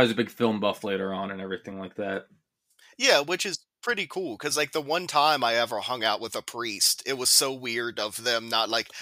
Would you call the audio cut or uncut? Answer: uncut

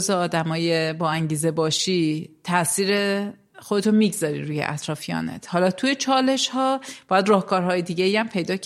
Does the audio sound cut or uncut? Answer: uncut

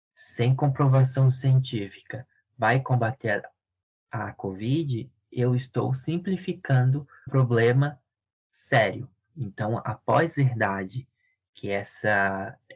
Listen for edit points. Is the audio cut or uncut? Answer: cut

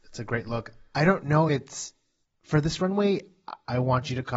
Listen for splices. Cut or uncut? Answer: cut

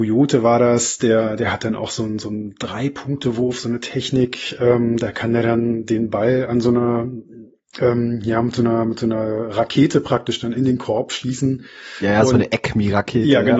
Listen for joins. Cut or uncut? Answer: uncut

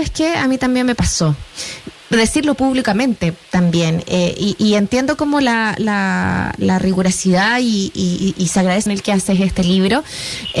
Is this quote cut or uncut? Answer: cut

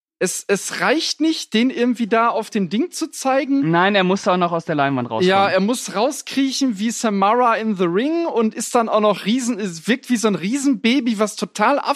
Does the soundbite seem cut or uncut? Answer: uncut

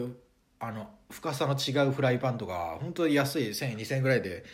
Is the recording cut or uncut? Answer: uncut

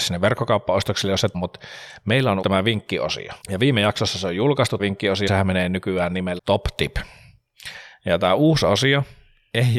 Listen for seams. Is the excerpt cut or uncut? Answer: cut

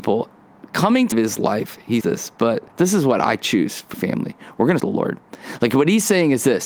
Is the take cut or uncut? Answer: cut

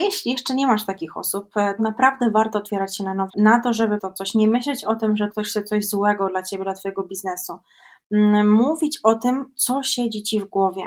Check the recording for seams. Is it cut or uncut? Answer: cut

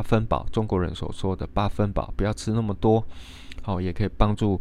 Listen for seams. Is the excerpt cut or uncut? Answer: uncut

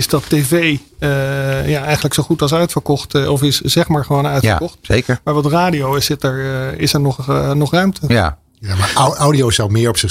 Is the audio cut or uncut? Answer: uncut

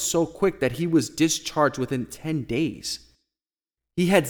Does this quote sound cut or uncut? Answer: uncut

